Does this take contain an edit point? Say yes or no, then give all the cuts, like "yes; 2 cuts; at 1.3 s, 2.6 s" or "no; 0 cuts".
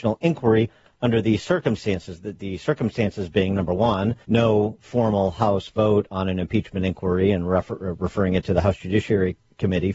yes; 1 cut; at 4.2 s